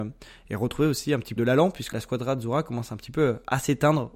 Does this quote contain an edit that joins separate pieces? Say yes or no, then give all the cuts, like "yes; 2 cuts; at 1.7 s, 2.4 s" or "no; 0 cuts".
yes; 2 cuts; at 1.4 s, 1.9 s